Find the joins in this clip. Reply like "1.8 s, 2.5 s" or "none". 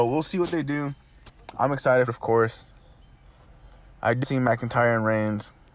2.1 s, 4.2 s